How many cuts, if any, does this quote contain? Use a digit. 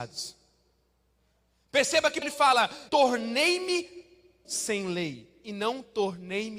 3